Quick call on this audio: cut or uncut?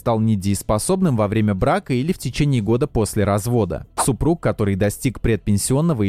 uncut